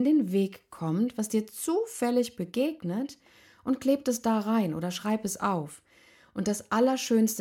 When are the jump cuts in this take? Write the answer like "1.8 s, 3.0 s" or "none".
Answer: none